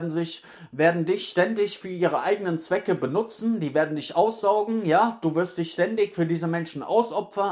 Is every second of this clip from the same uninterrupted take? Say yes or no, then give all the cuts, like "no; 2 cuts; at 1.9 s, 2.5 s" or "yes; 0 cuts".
yes; 0 cuts